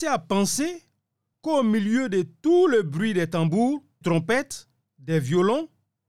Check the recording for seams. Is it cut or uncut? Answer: cut